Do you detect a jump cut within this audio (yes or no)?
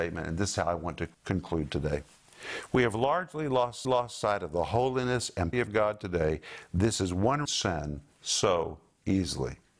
yes